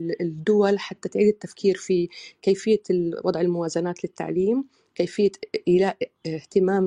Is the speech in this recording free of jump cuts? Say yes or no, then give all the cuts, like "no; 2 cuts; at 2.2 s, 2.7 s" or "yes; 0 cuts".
yes; 0 cuts